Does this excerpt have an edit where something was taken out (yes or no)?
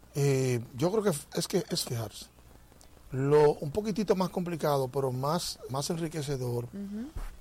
yes